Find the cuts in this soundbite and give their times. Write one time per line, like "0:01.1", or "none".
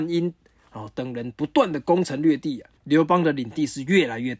0:02.8